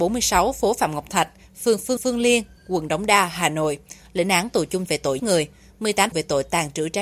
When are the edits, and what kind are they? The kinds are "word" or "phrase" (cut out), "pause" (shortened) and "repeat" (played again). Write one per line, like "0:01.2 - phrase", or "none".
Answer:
0:02.0 - repeat
0:04.9 - word
0:05.2 - word
0:06.1 - phrase